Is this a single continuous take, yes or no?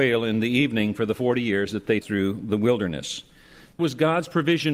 no